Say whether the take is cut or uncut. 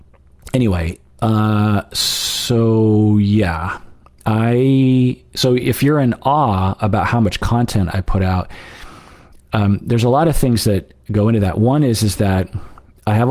uncut